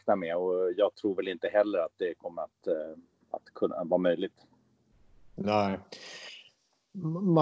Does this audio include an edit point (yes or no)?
no